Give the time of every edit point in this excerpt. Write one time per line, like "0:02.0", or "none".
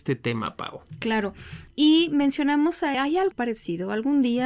0:02.9
0:03.3

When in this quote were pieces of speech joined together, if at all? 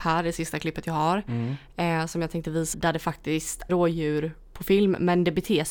0:02.7
0:03.7

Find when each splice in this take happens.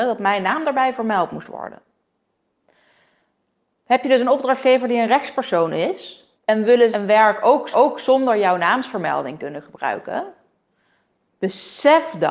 0:06.3
0:06.9
0:07.7

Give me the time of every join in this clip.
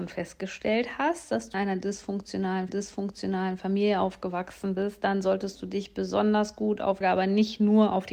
0:01.5
0:02.7
0:07.0

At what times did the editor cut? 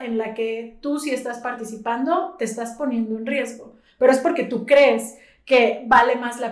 none

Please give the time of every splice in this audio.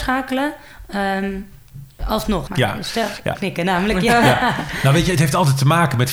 0:02.5
0:03.3

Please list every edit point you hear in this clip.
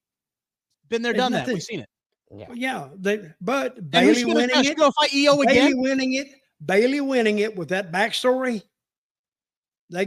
none

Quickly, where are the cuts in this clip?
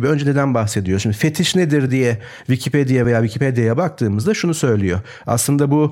none

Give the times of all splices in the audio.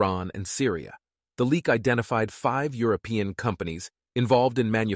none

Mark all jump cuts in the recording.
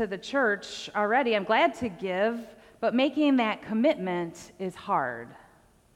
none

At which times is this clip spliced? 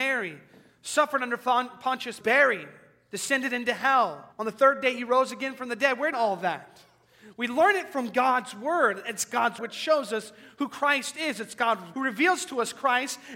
0:02.2
0:04.3
0:06.1
0:09.6
0:11.9

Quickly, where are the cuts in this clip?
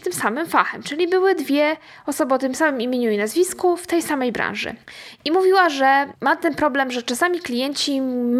none

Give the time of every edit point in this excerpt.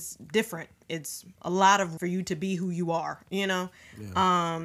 0:01.3
0:02.0

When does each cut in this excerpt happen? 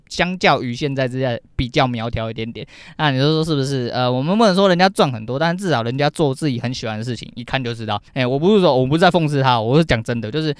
0:08.1

